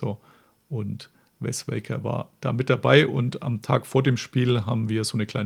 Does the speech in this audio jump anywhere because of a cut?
no; 0 cuts

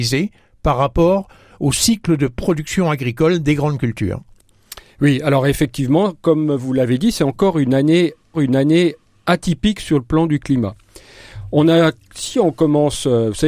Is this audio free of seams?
no; 1 cut; at 8.3 s

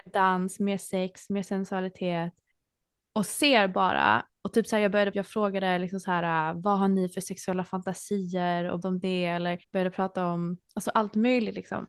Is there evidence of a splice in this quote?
yes; 4 cuts; at 2.5 s, 5.1 s, 8.8 s, 9.6 s

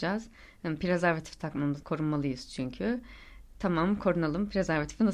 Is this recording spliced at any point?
yes; 1 cut; at 1.8 s

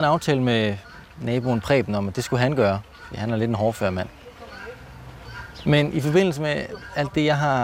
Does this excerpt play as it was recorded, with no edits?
no; 1 cut; at 1.1 s

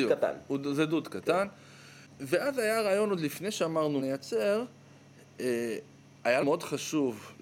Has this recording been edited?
yes; 2 cuts; at 4.0 s, 6.4 s

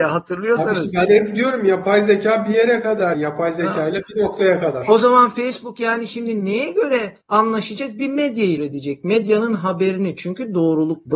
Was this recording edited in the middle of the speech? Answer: yes; 3 cuts; at 3.1 s, 7.2 s, 8.6 s

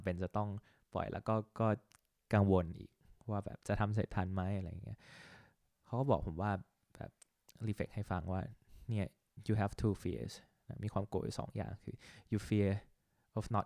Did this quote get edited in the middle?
no; 0 cuts

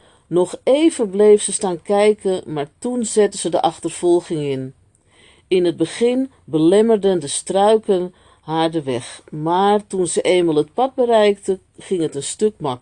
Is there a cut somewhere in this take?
no; 0 cuts

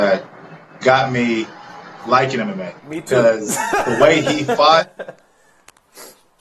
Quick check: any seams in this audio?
yes; 1 cut; at 2.8 s

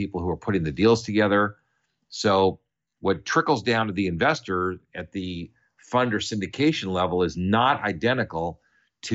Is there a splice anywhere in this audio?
no; 0 cuts

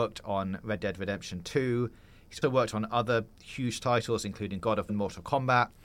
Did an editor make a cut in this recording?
yes; 2 cuts; at 2.4 s, 4.9 s

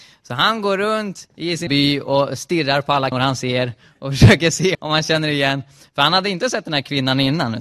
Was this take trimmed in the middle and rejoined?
yes; 3 cuts; at 1.7 s, 3.1 s, 4.7 s

